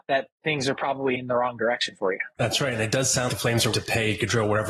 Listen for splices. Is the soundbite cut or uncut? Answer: cut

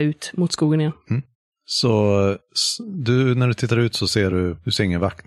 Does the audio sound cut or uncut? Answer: uncut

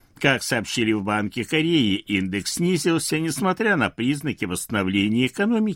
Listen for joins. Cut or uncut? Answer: uncut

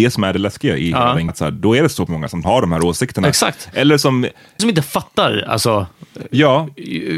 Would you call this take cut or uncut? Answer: cut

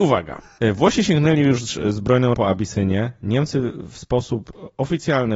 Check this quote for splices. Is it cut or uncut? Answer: cut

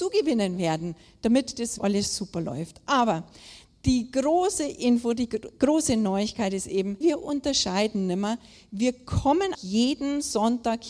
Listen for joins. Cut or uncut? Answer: cut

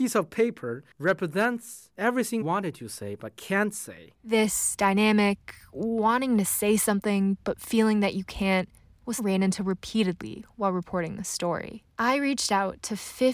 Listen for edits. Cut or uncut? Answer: cut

